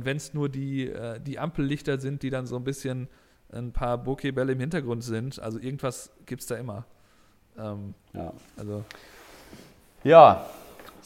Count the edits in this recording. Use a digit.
0